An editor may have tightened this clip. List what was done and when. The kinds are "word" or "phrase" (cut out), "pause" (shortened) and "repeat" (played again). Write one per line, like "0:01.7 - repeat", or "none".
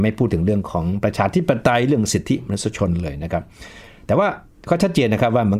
none